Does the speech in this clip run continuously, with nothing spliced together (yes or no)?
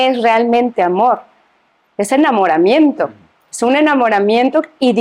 yes